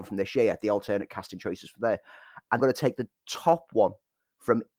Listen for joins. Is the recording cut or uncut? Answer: cut